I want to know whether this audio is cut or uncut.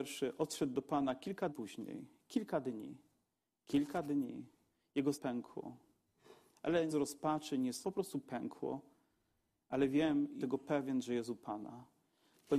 cut